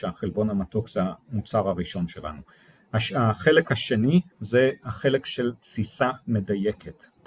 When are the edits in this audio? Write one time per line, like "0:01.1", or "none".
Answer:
0:04.3

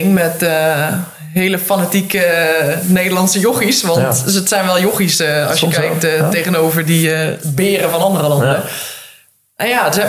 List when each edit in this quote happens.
none

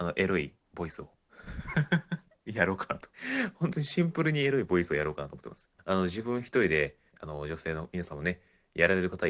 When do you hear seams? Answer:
0:03.1
0:05.8
0:07.1

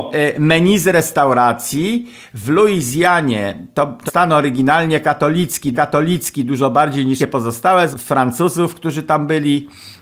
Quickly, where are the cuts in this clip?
0:04.1
0:05.7
0:07.2
0:07.9

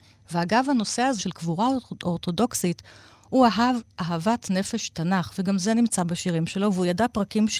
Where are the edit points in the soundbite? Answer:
0:01.2

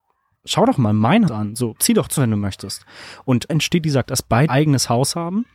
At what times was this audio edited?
0:01.3
0:01.8
0:02.2
0:03.5
0:04.0
0:04.5

